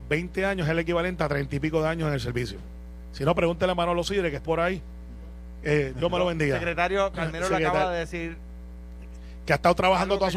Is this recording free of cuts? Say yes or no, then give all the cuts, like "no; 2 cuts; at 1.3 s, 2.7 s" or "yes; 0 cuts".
no; 1 cut; at 4.4 s